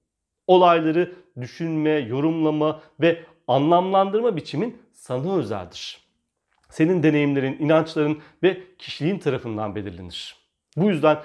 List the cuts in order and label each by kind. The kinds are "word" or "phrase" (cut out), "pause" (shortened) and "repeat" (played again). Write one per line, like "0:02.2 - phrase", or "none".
none